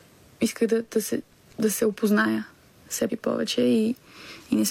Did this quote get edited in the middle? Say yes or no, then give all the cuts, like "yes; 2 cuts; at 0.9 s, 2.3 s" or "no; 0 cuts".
yes; 1 cut; at 3.1 s